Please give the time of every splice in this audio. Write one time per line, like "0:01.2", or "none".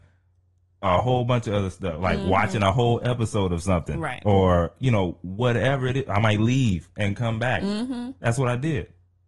none